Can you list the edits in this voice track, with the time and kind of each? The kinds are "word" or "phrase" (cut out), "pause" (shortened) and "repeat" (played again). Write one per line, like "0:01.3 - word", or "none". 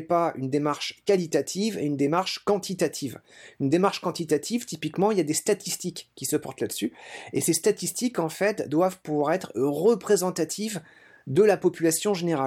none